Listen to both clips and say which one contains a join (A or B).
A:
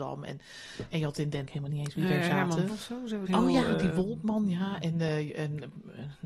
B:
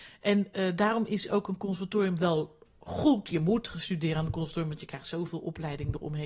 A